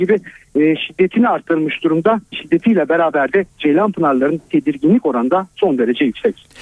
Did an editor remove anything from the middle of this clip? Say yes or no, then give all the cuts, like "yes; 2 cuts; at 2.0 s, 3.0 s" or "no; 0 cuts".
yes; 1 cut; at 3.5 s